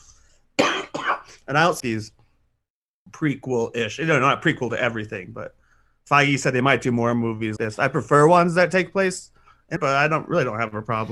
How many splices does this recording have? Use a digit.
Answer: 3